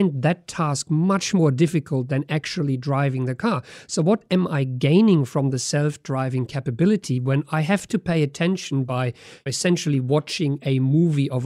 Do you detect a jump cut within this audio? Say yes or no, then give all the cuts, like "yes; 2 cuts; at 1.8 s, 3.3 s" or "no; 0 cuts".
no; 0 cuts